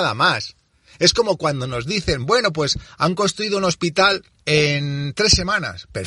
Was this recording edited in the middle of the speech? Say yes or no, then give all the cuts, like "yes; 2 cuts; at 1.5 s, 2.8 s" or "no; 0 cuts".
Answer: no; 0 cuts